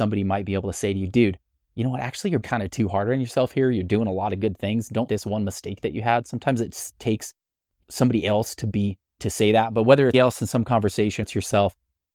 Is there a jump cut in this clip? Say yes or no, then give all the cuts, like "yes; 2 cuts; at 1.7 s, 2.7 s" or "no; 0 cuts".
yes; 6 cuts; at 2.4 s, 5.1 s, 7.8 s, 9.2 s, 10.1 s, 11.2 s